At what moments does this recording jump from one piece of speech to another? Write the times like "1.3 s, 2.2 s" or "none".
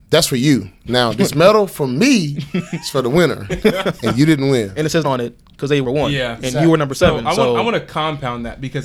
5.0 s, 5.8 s